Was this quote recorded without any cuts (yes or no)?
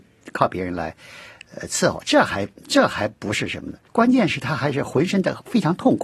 no